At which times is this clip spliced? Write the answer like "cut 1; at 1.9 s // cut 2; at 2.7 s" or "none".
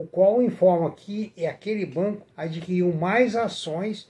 cut 1; at 2.3 s